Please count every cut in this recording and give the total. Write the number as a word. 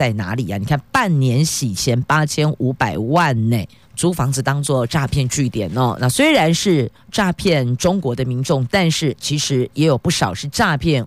zero